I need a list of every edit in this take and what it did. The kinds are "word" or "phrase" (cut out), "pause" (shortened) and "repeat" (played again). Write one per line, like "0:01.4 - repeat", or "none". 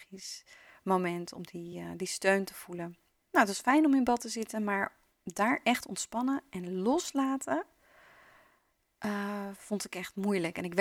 none